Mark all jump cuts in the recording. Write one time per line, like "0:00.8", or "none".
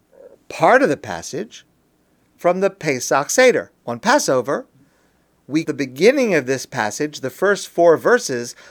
0:03.8
0:05.6